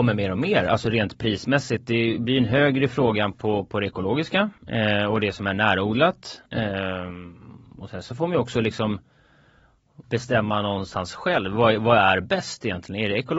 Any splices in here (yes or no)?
yes